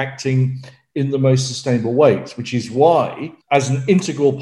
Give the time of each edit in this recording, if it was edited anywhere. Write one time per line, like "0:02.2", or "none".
0:03.4